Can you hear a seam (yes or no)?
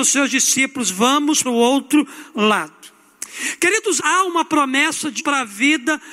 yes